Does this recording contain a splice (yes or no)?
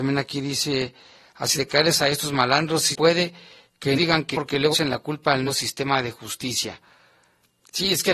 yes